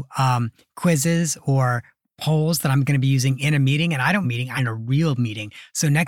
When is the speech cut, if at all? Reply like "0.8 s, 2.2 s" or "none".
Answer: 4.2 s, 4.6 s